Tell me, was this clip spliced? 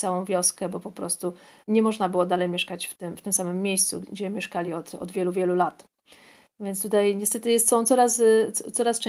no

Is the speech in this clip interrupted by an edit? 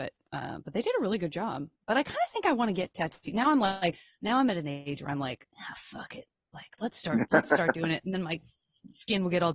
no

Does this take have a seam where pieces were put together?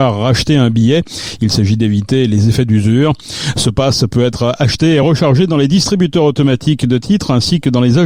no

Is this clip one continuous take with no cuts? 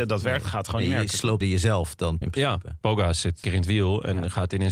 no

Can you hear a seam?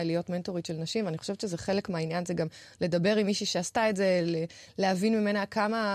no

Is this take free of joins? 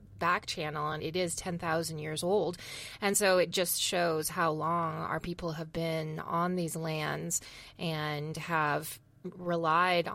yes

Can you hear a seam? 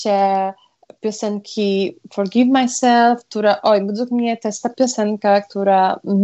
no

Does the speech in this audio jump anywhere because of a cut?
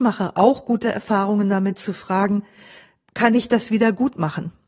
no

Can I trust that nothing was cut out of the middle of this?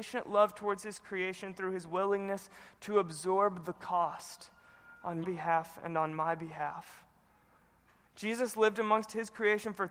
no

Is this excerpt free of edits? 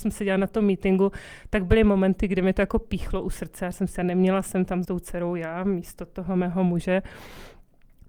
no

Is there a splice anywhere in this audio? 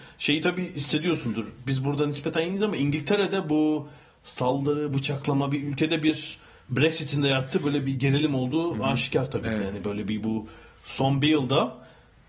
no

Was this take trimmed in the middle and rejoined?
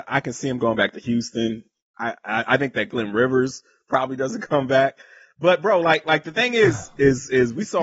no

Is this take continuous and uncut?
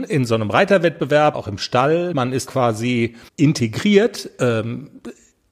no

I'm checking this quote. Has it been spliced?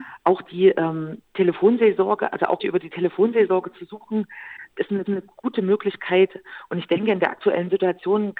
yes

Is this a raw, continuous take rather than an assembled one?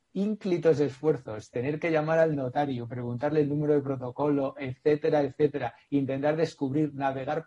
yes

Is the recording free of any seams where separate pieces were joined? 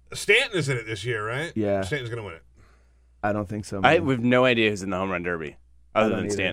yes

